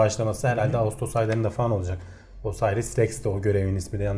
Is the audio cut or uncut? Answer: uncut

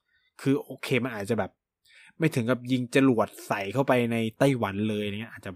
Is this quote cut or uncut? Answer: uncut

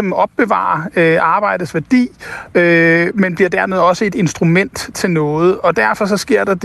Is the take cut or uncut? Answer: uncut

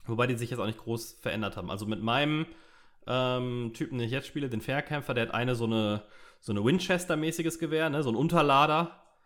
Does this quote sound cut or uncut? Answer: uncut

